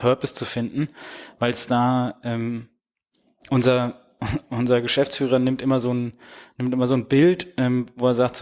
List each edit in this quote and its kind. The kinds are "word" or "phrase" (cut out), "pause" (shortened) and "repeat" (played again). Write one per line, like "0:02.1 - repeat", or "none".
none